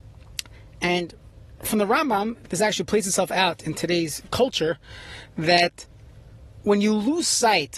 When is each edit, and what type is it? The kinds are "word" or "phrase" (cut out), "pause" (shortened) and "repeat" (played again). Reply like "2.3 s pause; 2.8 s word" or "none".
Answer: 4.3 s word